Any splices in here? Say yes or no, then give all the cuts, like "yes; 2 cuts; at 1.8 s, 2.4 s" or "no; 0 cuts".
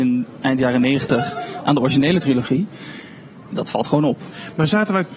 no; 0 cuts